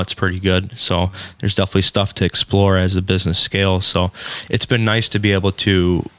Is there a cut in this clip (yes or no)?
no